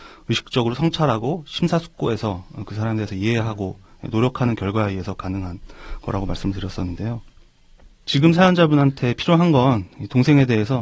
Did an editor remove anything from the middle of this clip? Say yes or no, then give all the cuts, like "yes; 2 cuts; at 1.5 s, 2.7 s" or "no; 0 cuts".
no; 0 cuts